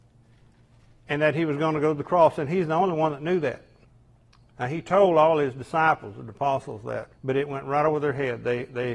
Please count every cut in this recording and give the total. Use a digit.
2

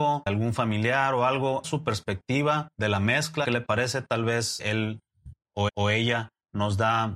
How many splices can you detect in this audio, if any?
5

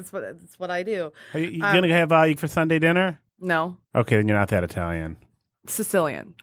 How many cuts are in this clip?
2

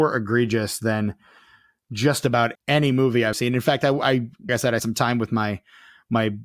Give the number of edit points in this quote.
4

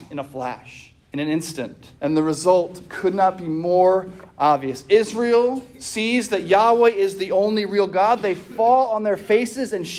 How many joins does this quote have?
2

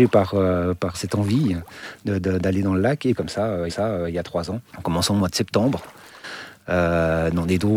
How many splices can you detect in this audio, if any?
4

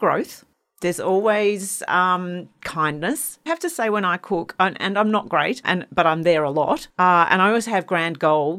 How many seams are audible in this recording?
1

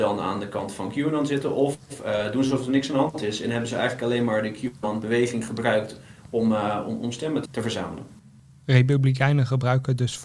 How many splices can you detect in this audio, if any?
1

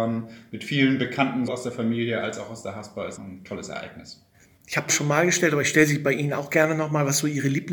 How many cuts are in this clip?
3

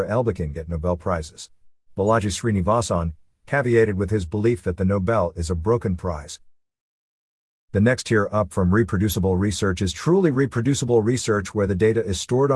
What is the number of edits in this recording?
0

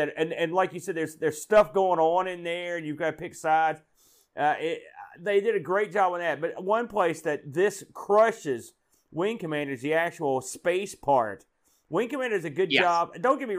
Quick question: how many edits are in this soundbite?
0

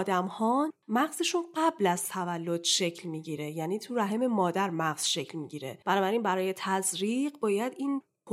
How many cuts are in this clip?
0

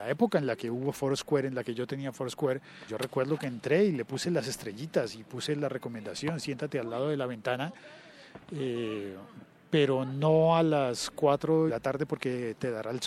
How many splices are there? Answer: 2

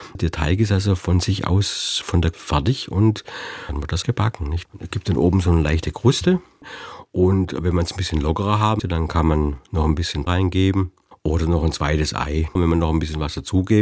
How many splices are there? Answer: 4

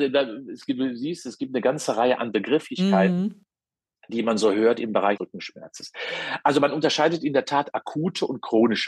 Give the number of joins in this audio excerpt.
1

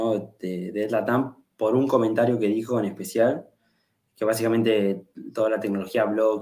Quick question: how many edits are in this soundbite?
0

